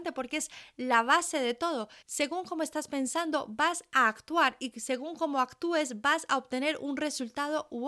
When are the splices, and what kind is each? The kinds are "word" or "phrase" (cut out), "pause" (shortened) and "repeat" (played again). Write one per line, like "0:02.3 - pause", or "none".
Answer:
0:02.0 - pause